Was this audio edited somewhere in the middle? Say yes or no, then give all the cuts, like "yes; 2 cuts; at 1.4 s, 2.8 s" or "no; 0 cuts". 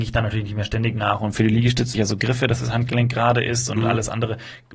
yes; 1 cut; at 1.9 s